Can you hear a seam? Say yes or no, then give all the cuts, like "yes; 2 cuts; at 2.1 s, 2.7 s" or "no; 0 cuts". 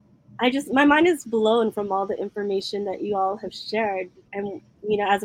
yes; 2 cuts; at 1.2 s, 4.3 s